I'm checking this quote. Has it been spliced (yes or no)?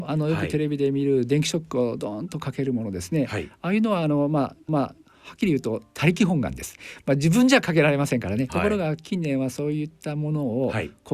yes